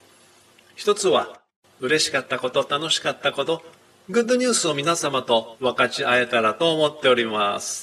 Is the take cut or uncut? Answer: uncut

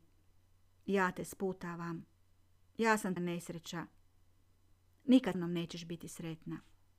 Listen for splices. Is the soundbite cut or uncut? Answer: cut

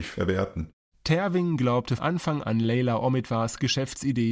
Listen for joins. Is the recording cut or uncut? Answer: cut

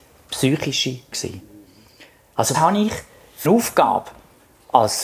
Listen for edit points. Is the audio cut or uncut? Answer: cut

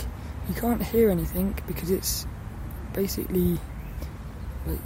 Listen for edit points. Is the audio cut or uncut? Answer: uncut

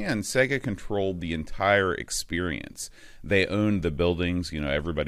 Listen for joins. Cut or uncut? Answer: uncut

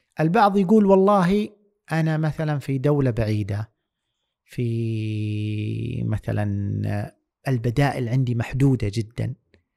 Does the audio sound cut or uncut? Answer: uncut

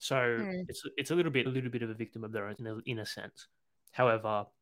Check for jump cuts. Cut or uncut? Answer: cut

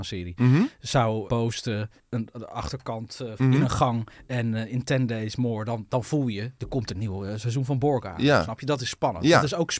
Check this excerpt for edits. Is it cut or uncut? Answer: cut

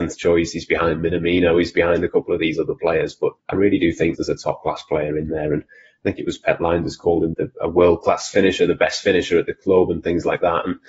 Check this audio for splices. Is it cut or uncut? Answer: cut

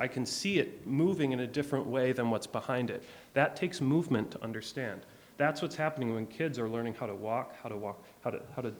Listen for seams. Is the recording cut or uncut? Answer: uncut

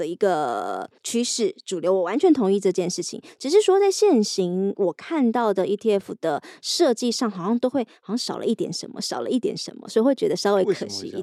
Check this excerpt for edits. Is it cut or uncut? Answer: cut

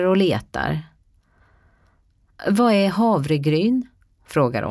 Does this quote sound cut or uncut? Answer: uncut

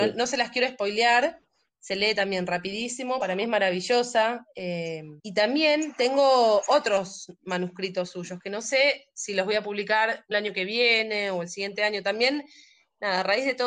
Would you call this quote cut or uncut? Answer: cut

